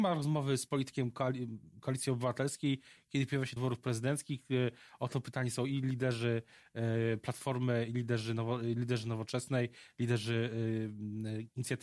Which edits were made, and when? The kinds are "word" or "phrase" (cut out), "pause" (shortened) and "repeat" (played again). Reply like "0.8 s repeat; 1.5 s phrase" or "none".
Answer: 3.6 s word